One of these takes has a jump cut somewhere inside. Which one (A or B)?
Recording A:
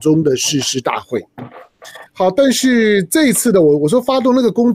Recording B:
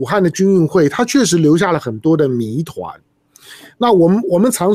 A